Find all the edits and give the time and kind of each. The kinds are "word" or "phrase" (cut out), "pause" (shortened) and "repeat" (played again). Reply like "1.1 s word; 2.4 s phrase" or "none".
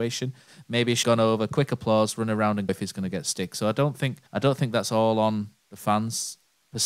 1.0 s word; 2.7 s word; 4.3 s pause